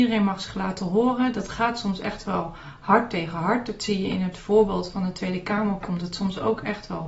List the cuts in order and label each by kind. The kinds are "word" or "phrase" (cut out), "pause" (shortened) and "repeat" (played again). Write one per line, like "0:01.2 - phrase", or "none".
none